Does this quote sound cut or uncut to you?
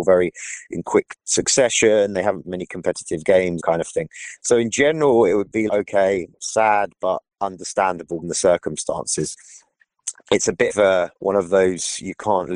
cut